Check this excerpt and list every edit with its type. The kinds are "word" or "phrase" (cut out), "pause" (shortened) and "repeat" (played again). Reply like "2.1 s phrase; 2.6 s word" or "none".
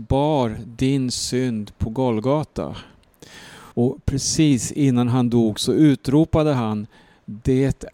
3.7 s pause